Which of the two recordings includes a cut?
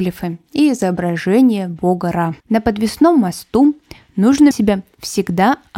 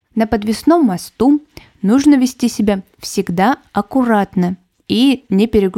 first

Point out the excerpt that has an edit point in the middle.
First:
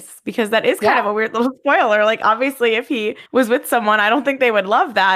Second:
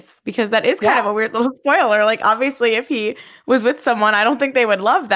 first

